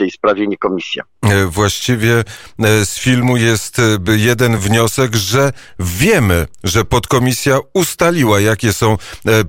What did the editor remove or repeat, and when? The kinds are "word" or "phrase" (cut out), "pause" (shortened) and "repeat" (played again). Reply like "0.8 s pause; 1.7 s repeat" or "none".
none